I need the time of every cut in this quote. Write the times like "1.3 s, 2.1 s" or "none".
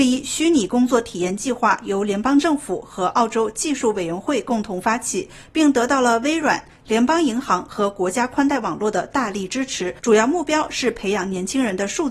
10.0 s